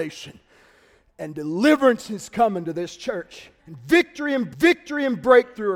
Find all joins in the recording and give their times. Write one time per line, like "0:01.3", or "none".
0:03.6
0:04.5